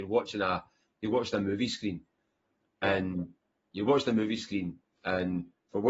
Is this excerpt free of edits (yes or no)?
yes